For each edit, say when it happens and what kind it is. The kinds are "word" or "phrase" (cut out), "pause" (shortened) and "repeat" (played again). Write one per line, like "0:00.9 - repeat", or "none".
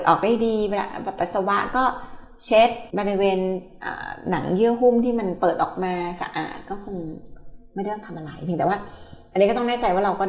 0:02.9 - pause